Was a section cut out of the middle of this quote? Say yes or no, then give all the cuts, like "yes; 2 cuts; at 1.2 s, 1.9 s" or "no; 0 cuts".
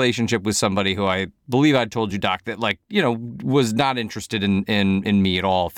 no; 0 cuts